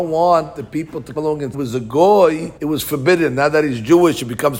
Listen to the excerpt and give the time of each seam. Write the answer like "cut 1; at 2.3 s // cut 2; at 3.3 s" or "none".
cut 1; at 1.2 s // cut 2; at 1.5 s // cut 3; at 2.6 s

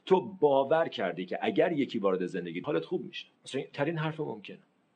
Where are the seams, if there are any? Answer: cut 1; at 2.6 s // cut 2; at 3.4 s // cut 3; at 3.7 s

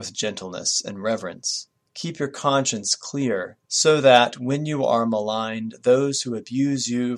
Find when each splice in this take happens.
cut 1; at 1.9 s // cut 2; at 3.6 s

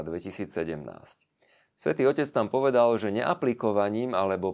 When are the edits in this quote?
none

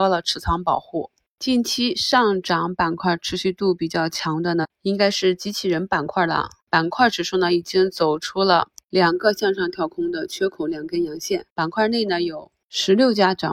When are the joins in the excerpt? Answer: cut 1; at 11.5 s

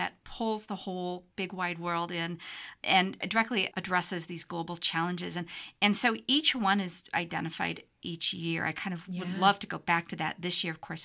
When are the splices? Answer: none

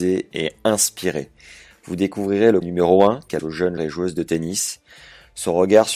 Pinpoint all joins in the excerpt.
cut 1; at 2.6 s // cut 2; at 3.4 s // cut 3; at 3.8 s

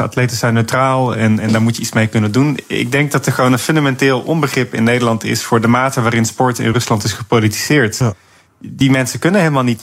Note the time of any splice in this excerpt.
none

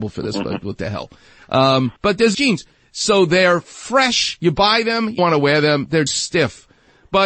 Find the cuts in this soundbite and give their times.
cut 1; at 2.0 s // cut 2; at 2.3 s // cut 3; at 5.2 s // cut 4; at 6.1 s

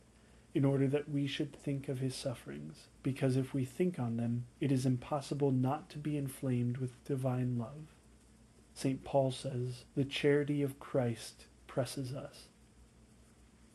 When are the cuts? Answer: cut 1; at 2.9 s // cut 2; at 4.5 s // cut 3; at 8.2 s // cut 4; at 9.9 s

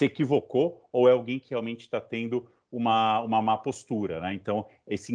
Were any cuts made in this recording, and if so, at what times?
none

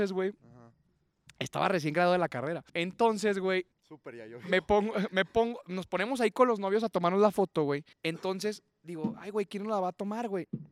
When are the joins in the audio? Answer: cut 1; at 2.7 s // cut 2; at 3.7 s // cut 3; at 7.9 s

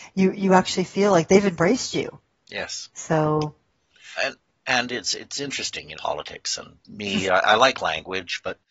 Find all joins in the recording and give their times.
cut 1; at 4.2 s // cut 2; at 6.0 s // cut 3; at 6.8 s

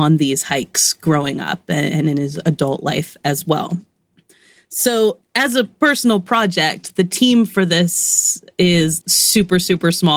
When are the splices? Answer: cut 1; at 9.0 s

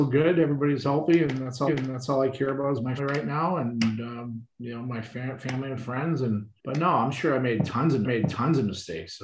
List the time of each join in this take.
cut 1; at 1.7 s // cut 2; at 3.0 s // cut 3; at 4.5 s // cut 4; at 6.6 s // cut 5; at 8.0 s

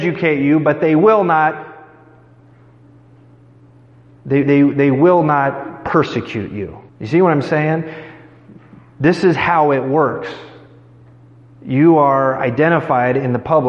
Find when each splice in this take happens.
cut 1; at 4.4 s // cut 2; at 6.9 s

